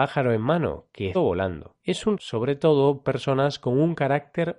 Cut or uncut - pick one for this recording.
cut